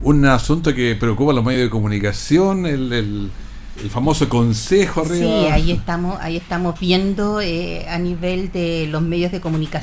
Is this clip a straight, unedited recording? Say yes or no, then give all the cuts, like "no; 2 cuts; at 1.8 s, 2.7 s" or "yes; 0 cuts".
yes; 0 cuts